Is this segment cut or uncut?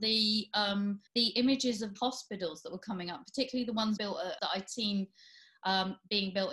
cut